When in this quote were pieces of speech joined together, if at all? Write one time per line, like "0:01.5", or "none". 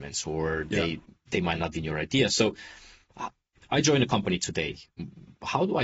0:01.7